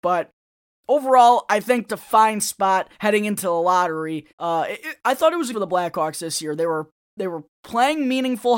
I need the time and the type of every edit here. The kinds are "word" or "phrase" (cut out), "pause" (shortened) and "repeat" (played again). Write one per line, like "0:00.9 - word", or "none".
0:01.9 - phrase
0:02.9 - pause
0:04.3 - pause
0:05.5 - phrase